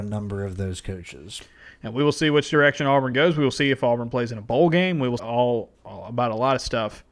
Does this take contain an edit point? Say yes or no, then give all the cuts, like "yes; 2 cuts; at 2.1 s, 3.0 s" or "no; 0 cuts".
yes; 2 cuts; at 5.2 s, 5.7 s